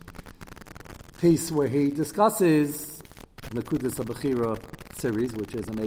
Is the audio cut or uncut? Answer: cut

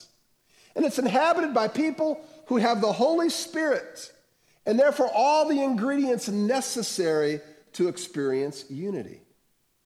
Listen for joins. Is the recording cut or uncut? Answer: uncut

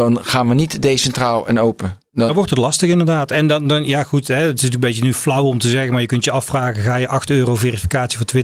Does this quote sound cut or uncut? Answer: uncut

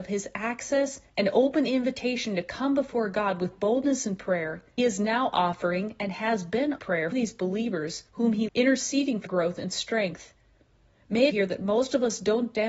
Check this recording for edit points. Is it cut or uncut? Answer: cut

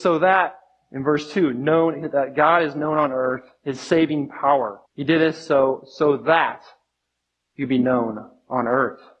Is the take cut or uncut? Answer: cut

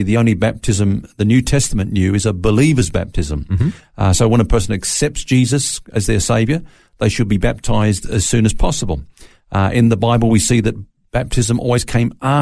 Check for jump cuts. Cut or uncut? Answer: uncut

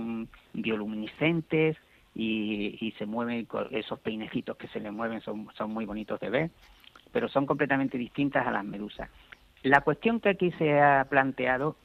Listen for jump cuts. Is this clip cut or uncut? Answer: uncut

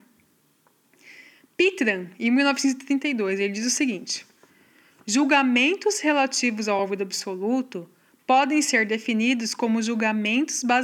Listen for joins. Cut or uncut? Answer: uncut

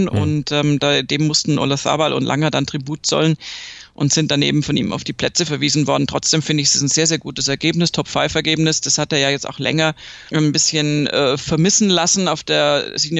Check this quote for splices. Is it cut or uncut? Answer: cut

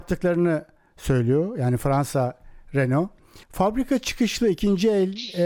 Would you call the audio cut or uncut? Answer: cut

